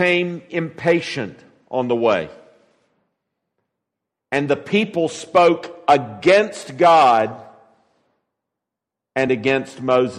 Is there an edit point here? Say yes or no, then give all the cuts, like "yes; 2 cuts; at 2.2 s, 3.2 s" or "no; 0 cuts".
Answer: no; 0 cuts